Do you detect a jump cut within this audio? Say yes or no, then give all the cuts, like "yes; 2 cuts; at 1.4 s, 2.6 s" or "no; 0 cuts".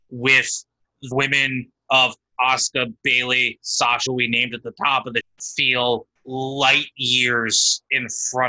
yes; 5 cuts; at 1.1 s, 3.0 s, 4.1 s, 5.2 s, 6.2 s